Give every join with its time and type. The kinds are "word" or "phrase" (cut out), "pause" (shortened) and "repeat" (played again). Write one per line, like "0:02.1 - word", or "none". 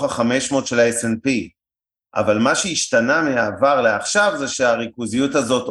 none